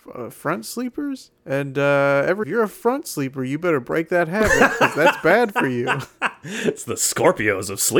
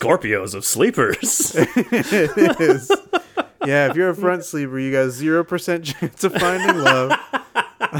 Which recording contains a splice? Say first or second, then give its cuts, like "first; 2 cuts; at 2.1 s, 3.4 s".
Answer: first; 2 cuts; at 1.4 s, 2.4 s